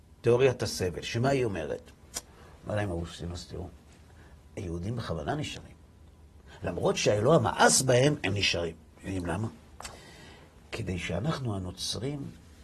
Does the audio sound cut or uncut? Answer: uncut